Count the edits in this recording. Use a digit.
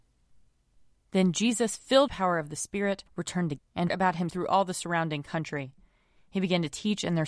5